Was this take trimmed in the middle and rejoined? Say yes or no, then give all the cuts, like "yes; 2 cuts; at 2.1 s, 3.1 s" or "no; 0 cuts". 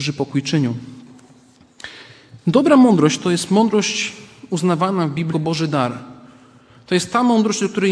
yes; 1 cut; at 5.3 s